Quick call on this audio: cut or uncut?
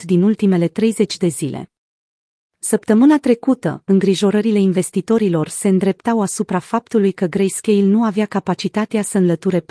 uncut